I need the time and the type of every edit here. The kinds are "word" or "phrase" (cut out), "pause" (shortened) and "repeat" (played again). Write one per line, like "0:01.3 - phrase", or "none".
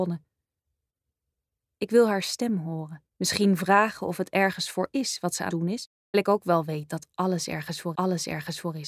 0:03.1 - pause
0:05.5 - word
0:06.1 - word
0:07.9 - repeat